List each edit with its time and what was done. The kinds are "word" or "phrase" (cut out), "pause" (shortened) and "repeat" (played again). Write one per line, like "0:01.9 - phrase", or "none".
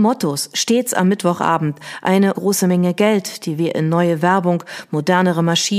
0:02.3 - word